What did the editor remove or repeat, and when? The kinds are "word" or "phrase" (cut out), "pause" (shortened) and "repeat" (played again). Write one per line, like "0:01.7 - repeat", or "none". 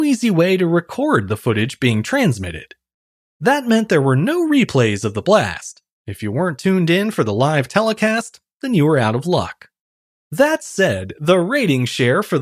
none